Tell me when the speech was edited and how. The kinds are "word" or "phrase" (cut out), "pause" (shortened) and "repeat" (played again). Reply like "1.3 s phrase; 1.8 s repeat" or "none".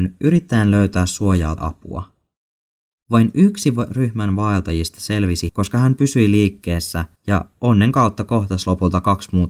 1.6 s word; 5.5 s word; 7.2 s pause